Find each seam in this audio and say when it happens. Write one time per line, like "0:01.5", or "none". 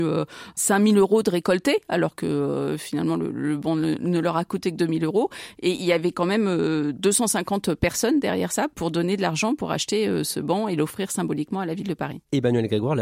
none